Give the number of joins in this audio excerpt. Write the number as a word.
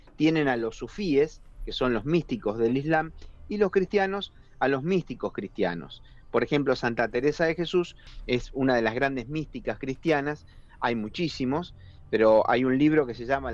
zero